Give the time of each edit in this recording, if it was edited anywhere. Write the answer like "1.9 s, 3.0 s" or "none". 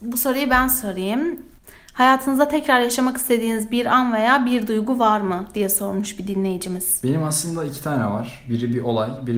none